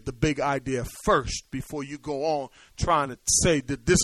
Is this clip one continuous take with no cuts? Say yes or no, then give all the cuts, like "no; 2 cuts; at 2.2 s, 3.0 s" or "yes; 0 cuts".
yes; 0 cuts